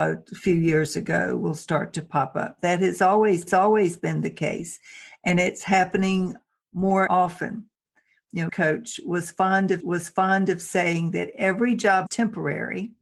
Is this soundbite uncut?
no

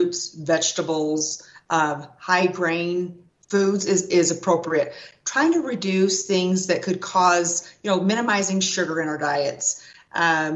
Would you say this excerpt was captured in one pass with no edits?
yes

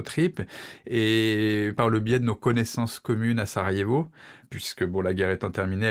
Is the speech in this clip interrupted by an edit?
no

